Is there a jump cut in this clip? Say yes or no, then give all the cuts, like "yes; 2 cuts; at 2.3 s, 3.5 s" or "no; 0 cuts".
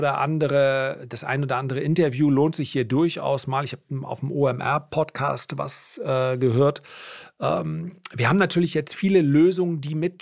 no; 0 cuts